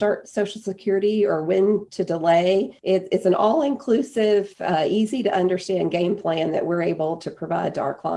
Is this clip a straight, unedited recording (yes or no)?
no